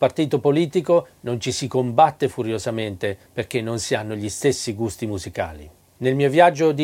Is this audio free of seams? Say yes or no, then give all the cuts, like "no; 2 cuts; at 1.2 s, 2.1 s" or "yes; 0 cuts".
no; 1 cut; at 3.2 s